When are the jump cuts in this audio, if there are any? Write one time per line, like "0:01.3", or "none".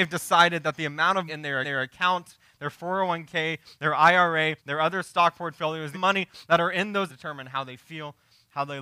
0:01.3
0:01.6
0:04.6
0:05.9
0:07.1